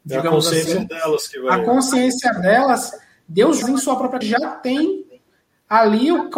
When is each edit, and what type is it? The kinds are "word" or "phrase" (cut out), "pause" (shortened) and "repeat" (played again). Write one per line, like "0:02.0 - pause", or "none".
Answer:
0:03.6 - phrase
0:04.2 - word